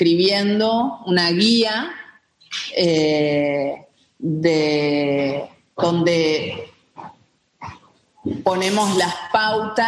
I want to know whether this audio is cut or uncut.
uncut